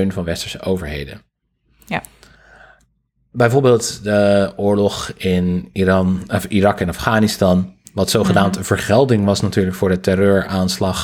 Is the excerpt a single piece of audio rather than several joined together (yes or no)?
yes